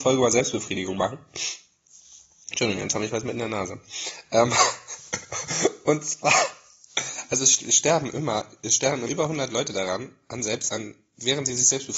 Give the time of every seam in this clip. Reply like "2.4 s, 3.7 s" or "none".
9.1 s